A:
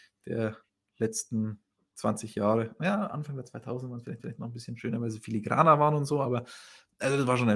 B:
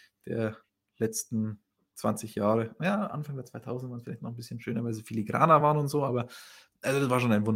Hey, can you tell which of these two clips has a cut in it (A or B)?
A